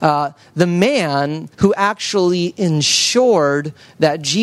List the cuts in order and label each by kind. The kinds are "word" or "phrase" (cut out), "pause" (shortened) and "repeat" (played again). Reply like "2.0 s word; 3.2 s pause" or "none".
1.5 s pause